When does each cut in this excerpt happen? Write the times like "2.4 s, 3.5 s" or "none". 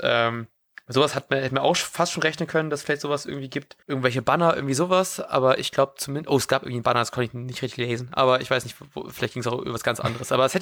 3.8 s